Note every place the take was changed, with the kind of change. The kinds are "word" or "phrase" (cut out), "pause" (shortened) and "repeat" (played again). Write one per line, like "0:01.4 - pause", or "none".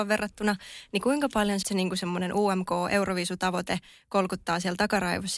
0:01.6 - word